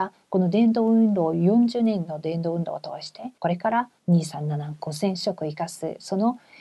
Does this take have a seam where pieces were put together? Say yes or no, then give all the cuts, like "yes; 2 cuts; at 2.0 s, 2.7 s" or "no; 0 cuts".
yes; 2 cuts; at 3.4 s, 4.0 s